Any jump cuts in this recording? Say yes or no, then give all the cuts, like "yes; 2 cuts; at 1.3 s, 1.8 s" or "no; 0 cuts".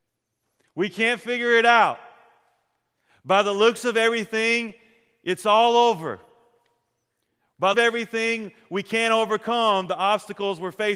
yes; 1 cut; at 7.7 s